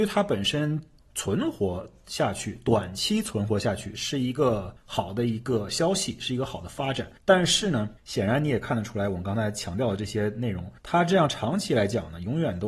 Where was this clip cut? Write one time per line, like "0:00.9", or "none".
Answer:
0:04.8
0:07.2
0:08.0
0:10.8